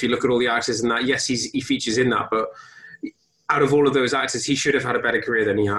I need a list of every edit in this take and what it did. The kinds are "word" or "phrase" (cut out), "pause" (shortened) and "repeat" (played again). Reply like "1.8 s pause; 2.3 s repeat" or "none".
none